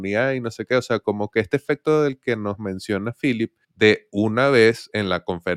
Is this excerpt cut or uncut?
cut